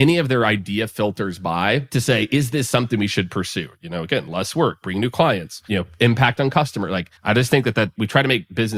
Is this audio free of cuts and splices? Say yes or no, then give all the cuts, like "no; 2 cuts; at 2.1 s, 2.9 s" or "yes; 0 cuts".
no; 1 cut; at 7.2 s